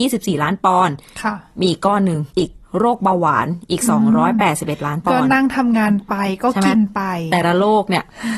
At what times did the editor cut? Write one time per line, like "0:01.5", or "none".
0:02.3
0:02.6